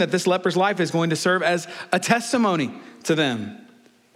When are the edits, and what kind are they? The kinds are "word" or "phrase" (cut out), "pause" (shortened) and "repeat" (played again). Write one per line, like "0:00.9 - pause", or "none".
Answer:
none